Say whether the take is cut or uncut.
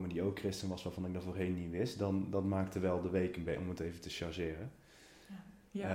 uncut